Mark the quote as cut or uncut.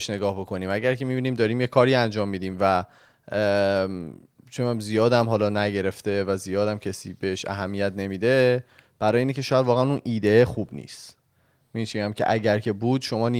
uncut